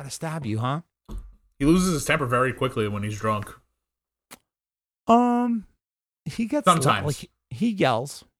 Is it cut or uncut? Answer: uncut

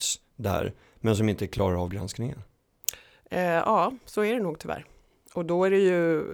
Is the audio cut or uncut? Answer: uncut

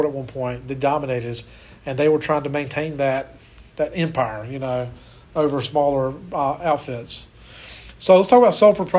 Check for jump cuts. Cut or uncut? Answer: uncut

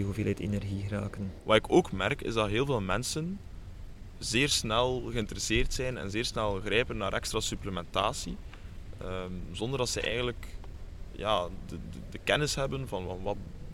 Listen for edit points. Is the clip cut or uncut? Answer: uncut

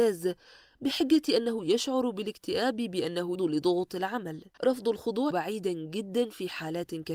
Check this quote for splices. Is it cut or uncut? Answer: cut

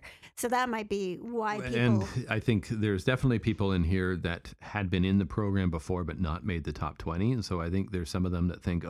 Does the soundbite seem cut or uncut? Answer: uncut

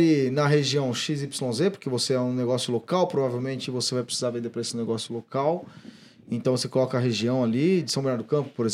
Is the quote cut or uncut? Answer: uncut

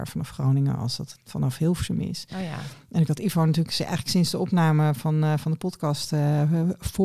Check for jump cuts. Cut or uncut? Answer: uncut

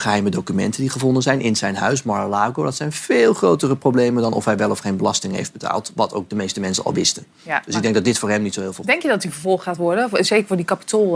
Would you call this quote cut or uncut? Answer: uncut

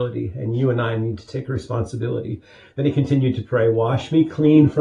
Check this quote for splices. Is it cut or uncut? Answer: uncut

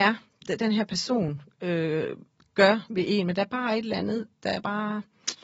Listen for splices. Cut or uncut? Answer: uncut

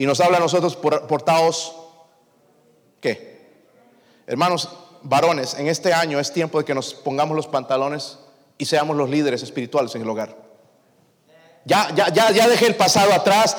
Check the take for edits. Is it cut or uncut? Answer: uncut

